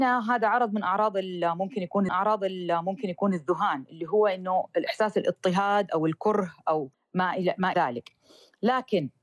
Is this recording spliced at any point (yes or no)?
yes